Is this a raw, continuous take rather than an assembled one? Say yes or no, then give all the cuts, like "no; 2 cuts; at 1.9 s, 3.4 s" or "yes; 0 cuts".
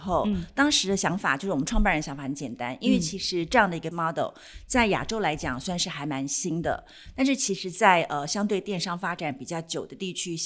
no; 1 cut; at 3.9 s